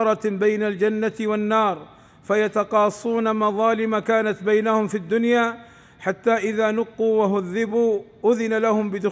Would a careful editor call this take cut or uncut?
uncut